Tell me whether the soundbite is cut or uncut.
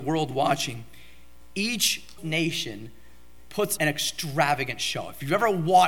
cut